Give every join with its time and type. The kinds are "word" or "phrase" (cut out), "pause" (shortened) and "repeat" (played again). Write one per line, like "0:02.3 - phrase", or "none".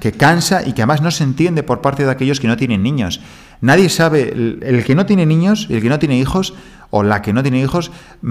none

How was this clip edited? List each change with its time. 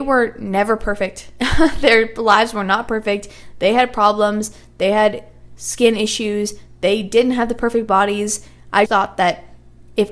0:08.9 - word

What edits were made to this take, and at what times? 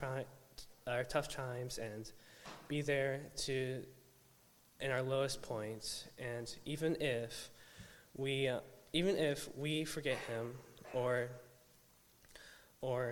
none

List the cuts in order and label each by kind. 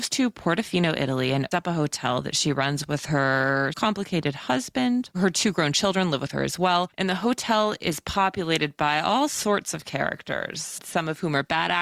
0:01.5 - word
0:03.7 - word

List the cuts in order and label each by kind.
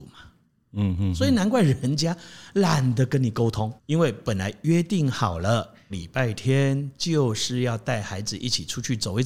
0:03.8 - pause
0:05.9 - phrase

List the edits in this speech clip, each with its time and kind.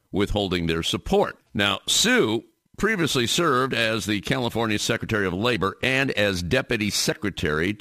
none

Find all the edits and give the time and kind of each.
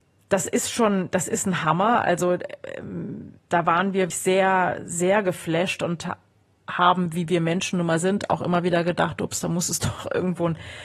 0:03.4 - pause
0:04.1 - word

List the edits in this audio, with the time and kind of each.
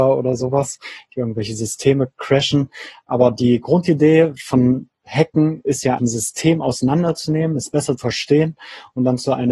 0:06.0 - word
0:08.0 - word

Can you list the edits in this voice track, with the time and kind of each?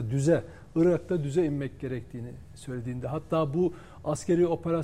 none

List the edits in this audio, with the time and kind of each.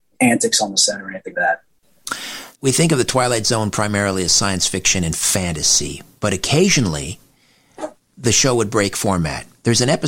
0:01.3 - word
0:02.5 - word
0:08.0 - word

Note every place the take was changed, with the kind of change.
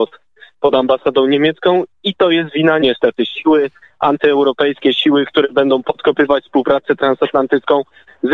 0:02.8 - word

